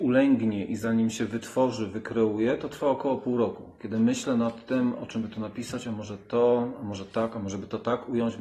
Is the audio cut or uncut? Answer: uncut